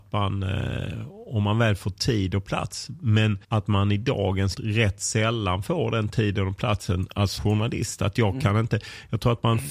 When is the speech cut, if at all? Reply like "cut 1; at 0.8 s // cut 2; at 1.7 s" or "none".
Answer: cut 1; at 3.4 s // cut 2; at 4.6 s // cut 3; at 7.4 s